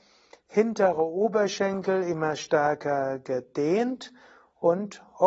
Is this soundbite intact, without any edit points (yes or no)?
yes